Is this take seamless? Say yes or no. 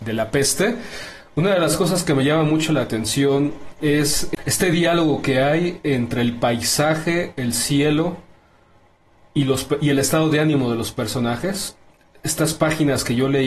yes